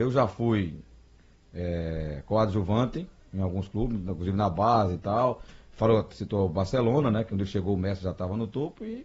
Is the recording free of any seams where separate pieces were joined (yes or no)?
yes